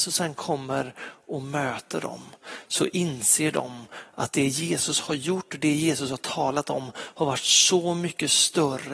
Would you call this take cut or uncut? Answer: uncut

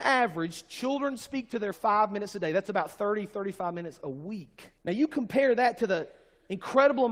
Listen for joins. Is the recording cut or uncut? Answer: cut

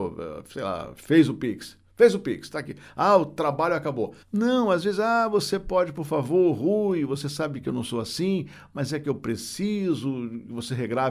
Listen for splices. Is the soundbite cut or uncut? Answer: cut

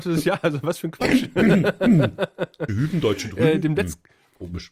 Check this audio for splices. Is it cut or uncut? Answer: cut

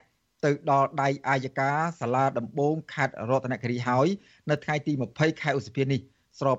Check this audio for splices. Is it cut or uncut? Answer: uncut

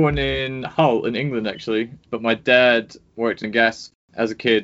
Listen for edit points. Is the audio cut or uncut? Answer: cut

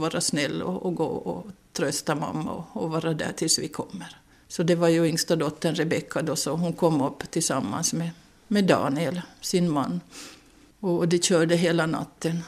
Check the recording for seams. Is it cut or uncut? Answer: uncut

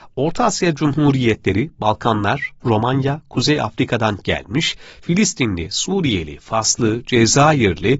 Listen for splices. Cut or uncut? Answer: uncut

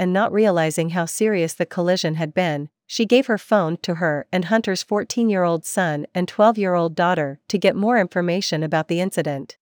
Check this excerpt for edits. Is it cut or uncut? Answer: uncut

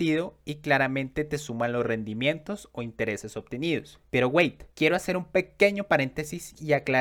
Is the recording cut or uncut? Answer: cut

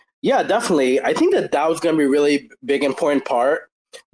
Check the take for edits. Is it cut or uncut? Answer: uncut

